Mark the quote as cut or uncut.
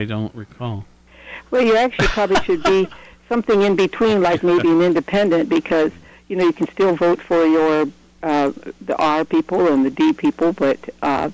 uncut